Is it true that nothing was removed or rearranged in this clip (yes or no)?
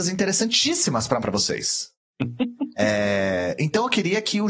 no